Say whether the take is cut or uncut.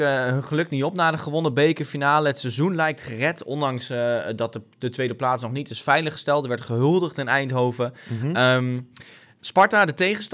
uncut